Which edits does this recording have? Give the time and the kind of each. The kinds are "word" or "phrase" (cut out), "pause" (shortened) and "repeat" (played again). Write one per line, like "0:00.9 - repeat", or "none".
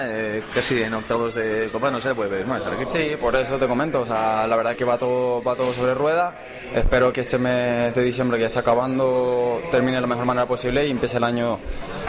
0:04.7 - word
0:07.1 - word